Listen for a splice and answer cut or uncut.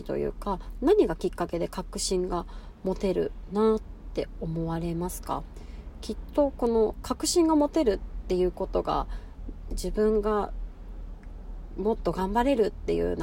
cut